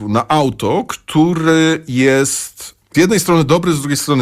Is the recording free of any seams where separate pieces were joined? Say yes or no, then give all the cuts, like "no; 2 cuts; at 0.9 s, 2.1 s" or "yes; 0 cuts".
no; 1 cut; at 2.9 s